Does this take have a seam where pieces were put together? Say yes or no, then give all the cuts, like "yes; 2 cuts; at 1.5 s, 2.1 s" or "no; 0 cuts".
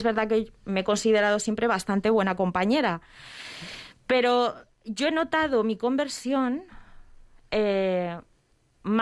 no; 0 cuts